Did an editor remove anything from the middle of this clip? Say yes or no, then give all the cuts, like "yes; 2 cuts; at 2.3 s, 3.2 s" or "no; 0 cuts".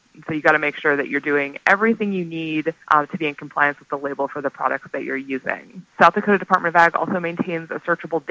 yes; 1 cut; at 2.8 s